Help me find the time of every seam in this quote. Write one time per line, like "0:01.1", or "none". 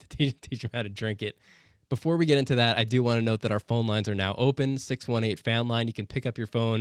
none